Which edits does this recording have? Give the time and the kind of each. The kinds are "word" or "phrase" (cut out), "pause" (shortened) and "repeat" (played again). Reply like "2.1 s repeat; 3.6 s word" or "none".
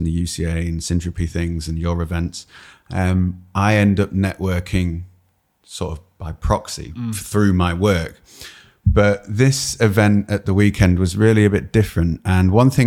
none